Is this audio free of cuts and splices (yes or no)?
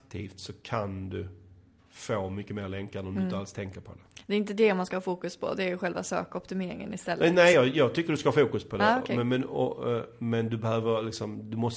yes